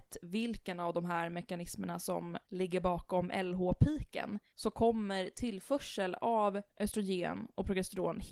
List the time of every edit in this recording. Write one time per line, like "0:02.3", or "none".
0:02.4
0:04.5
0:06.7